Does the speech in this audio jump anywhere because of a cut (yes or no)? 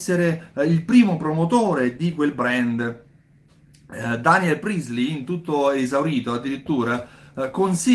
no